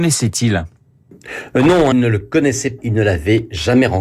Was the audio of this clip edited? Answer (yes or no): yes